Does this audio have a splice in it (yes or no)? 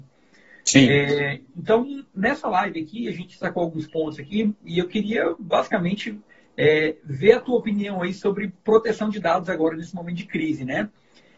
no